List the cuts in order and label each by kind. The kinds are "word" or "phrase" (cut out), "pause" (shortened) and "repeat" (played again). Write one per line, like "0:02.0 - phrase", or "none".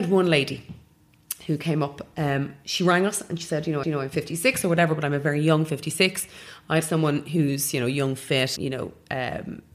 0:03.8 - repeat
0:06.8 - word
0:08.6 - word